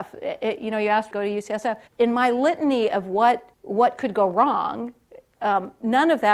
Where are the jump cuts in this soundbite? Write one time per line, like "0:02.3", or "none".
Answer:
0:01.1
0:01.9
0:03.5